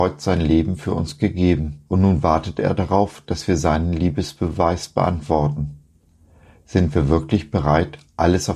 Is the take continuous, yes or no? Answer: no